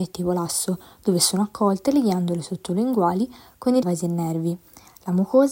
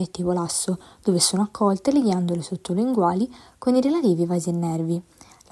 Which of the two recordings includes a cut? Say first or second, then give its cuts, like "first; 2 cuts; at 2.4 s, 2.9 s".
first; 1 cut; at 3.8 s